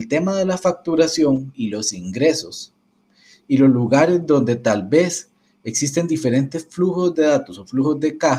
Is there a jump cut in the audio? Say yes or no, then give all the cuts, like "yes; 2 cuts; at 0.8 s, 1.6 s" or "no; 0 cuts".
no; 0 cuts